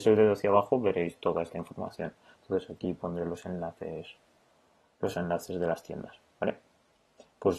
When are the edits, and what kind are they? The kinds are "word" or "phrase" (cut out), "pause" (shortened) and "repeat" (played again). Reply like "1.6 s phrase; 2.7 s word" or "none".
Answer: none